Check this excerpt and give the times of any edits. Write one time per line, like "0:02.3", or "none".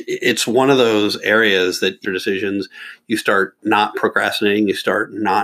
0:02.0